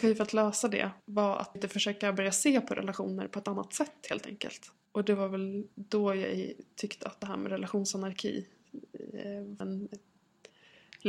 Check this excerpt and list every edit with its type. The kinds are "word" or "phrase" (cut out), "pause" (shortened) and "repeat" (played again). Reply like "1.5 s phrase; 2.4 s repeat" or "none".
1.0 s pause; 1.6 s word; 5.7 s pause; 9.6 s phrase